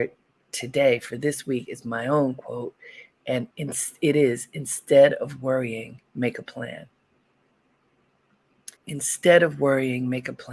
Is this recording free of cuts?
no; 3 cuts; at 3.5 s, 6.1 s, 8.8 s

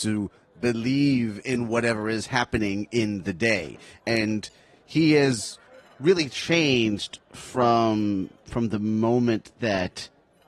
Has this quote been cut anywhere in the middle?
no; 0 cuts

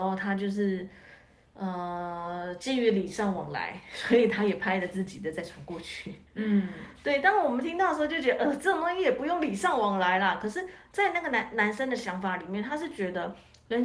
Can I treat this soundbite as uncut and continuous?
no; 1 cut; at 6.3 s

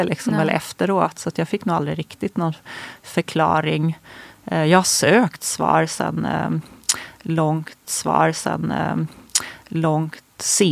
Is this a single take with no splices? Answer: no; 1 cut; at 7.8 s

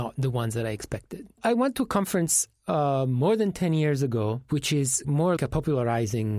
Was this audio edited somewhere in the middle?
yes; 2 cuts; at 5.0 s, 5.4 s

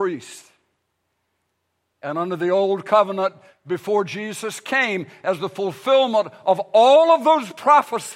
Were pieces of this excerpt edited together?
no; 0 cuts

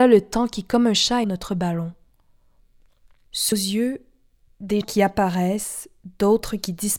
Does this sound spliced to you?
yes; 3 cuts; at 1.2 s, 3.5 s, 4.8 s

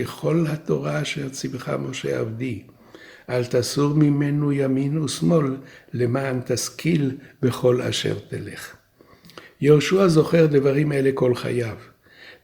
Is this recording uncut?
yes; 0 cuts

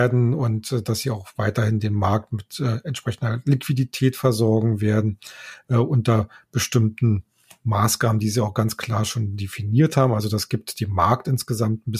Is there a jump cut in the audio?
no; 0 cuts

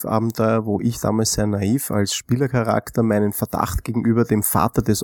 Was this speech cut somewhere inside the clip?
no; 0 cuts

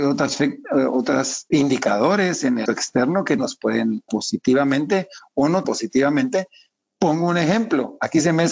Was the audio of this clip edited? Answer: yes; 5 cuts; at 1.5 s, 2.7 s, 3.4 s, 4.1 s, 5.6 s

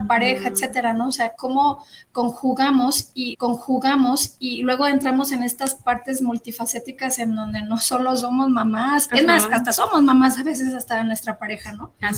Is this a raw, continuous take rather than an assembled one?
no; 2 cuts; at 3.3 s, 9.1 s

